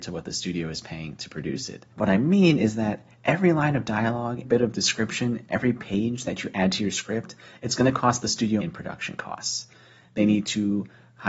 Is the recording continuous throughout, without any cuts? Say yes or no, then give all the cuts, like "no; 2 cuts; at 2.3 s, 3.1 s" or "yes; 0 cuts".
no; 3 cuts; at 1.9 s, 4.5 s, 8.6 s